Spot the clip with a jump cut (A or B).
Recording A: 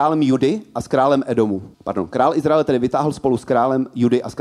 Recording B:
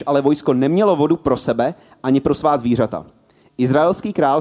A